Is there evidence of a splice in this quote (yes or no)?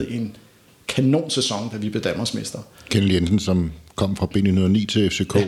no